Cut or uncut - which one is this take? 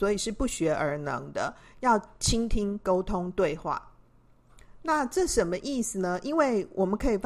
uncut